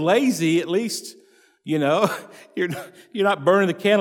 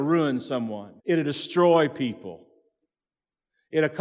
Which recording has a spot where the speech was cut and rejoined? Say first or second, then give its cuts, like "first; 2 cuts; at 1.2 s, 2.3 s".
second; 1 cut; at 1.0 s